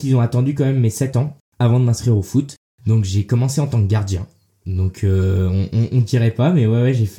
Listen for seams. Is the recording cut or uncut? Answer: uncut